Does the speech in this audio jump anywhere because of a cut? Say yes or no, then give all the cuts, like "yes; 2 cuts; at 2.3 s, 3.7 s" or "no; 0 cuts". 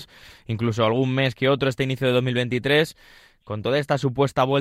no; 0 cuts